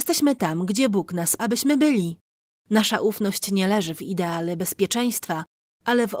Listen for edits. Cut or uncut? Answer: cut